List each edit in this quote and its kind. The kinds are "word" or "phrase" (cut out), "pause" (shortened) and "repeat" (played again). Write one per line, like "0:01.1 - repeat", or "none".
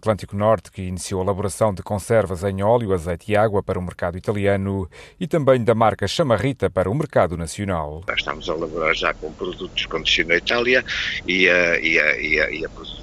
none